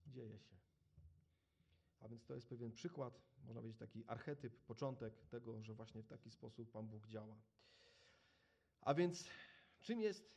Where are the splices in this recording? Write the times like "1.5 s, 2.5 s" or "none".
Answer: none